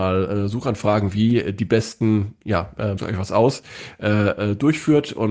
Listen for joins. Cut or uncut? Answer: cut